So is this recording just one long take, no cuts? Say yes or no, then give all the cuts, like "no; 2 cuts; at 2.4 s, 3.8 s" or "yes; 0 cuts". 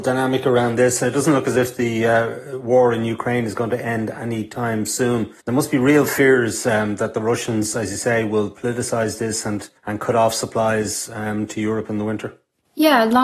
no; 2 cuts; at 5.4 s, 9.8 s